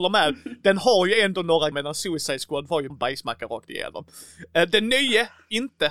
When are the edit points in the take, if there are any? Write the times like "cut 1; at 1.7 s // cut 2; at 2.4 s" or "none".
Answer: cut 1; at 1.7 s // cut 2; at 2.9 s